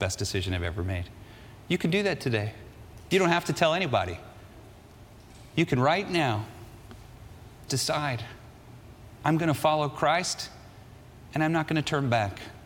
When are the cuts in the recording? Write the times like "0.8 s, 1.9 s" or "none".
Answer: 7.7 s

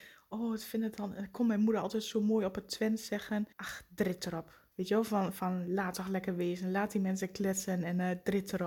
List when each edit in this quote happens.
3.5 s, 4.7 s

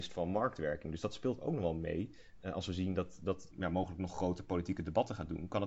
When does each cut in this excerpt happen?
3.5 s

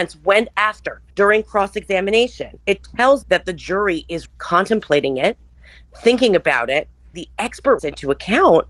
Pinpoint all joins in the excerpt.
1.1 s, 2.6 s, 3.2 s, 4.3 s, 7.1 s, 7.8 s

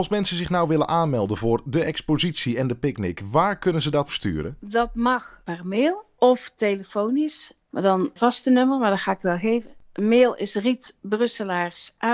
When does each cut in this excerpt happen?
4.1 s, 8.2 s

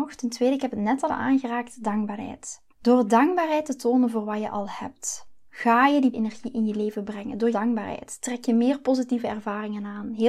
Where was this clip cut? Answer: 1.1 s, 2.7 s, 5.5 s, 6.1 s, 7.5 s

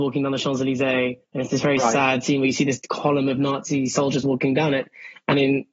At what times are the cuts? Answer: 1.2 s

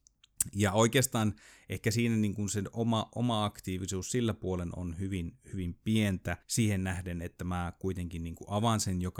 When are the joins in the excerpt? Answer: 6.4 s

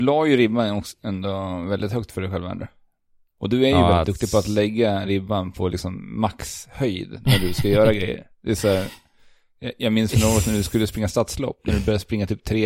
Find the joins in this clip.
none

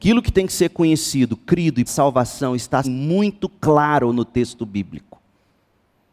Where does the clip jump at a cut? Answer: 1.9 s, 2.8 s

